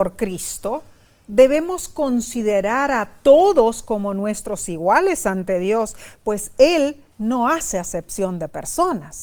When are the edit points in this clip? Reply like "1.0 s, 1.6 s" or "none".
7.1 s